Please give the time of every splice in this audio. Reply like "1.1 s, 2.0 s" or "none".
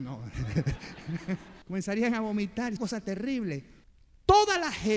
1.6 s, 2.8 s